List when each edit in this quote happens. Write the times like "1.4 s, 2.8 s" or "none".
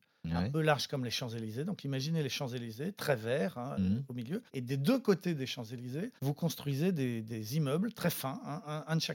4.5 s, 6.2 s